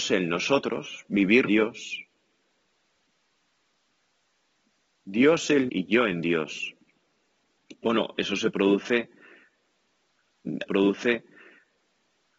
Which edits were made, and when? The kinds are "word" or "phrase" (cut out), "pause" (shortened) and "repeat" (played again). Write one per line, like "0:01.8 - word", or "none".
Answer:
0:01.5 - phrase
0:05.7 - word
0:10.7 - repeat

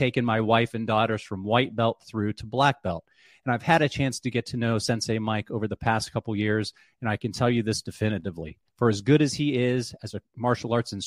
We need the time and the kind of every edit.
0:08.7 - pause

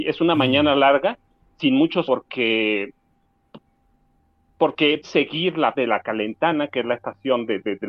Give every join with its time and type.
0:02.1 - word
0:05.0 - word
0:05.7 - word

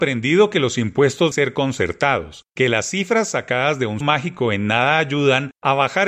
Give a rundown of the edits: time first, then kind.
0:01.3 - word
0:04.0 - word

